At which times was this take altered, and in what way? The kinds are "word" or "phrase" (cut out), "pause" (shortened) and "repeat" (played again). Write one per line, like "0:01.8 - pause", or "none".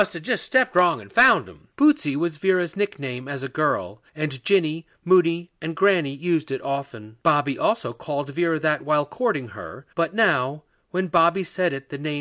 0:01.7 - pause
0:04.1 - pause
0:07.2 - pause
0:09.9 - pause